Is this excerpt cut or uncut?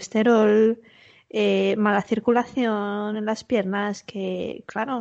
uncut